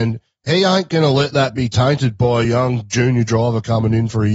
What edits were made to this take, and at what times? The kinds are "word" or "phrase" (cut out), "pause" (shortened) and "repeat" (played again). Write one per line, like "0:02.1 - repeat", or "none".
none

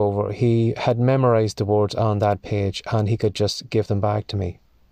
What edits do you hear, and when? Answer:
none

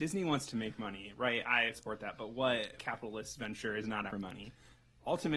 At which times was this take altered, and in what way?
0:01.7 - word
0:02.8 - word
0:04.1 - word

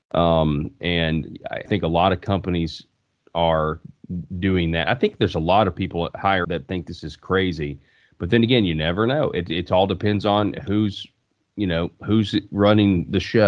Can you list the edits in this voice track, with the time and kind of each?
0:01.7 - word
0:06.4 - word

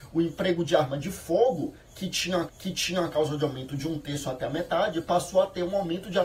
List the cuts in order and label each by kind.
0:02.5 - repeat

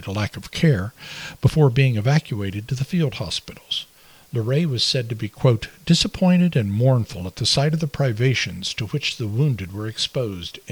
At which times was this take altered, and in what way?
none

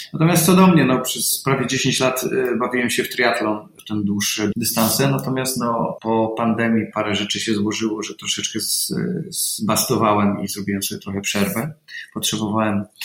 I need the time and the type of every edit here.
0:06.9 - word

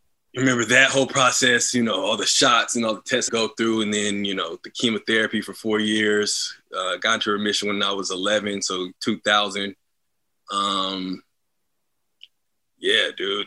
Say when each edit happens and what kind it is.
0:03.3 - phrase
0:09.0 - pause

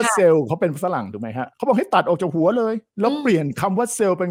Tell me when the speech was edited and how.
0:01.5 - pause
0:02.9 - pause

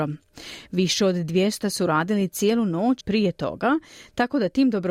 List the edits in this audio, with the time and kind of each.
0:01.6 - word
0:03.0 - word

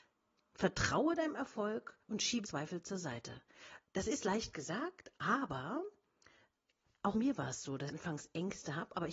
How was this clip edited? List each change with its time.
0:02.0 - pause
0:02.4 - word
0:03.8 - pause
0:07.1 - word
0:07.9 - word

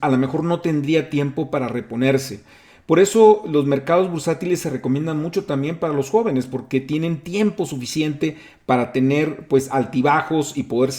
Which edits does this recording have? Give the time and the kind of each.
none

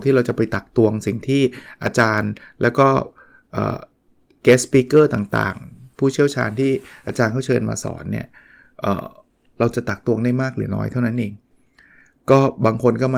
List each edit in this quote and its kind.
none

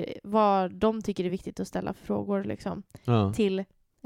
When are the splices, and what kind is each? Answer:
none

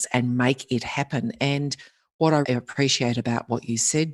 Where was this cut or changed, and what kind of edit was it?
0:02.4 - word

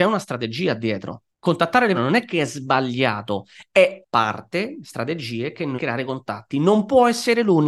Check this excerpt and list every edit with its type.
0:01.3 - pause
0:01.9 - word
0:04.0 - word
0:04.8 - word
0:05.8 - phrase

